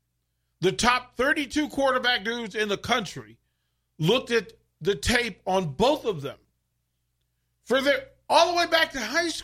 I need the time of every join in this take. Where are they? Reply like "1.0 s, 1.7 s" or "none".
none

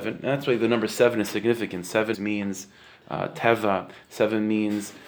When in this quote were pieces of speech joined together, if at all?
2.1 s

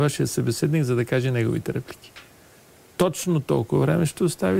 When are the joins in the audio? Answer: none

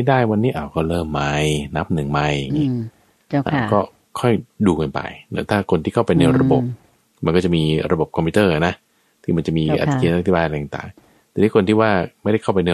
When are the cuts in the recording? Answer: none

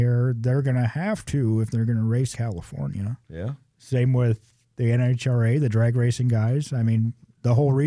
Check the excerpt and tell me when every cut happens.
2.3 s, 3.2 s

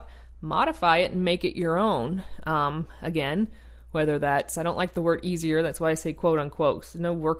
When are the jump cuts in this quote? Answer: none

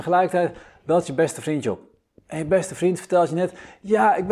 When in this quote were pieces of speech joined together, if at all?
none

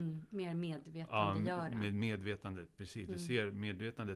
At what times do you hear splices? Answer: none

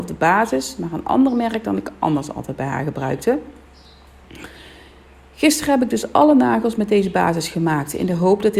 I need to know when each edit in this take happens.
none

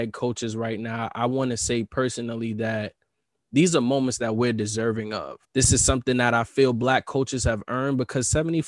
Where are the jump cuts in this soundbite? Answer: 5.4 s

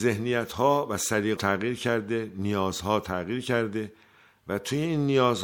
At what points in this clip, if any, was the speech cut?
1.4 s

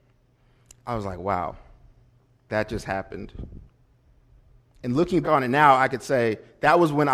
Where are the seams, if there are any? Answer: 2.5 s, 5.2 s

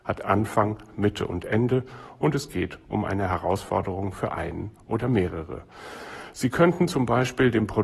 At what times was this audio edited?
none

